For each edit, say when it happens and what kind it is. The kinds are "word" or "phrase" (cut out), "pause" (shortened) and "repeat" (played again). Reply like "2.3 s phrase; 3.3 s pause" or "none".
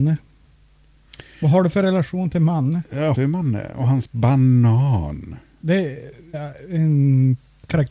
3.1 s word; 6.3 s word